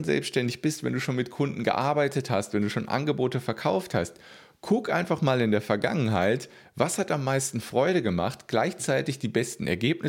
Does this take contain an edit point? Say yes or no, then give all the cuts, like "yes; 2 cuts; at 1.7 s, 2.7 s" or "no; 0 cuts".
no; 0 cuts